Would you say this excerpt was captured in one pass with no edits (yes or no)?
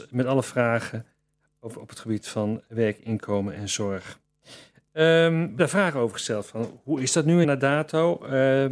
no